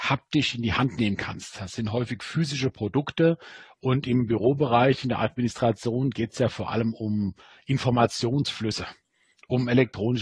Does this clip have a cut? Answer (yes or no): no